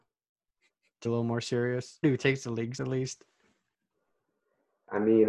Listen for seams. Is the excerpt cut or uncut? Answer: cut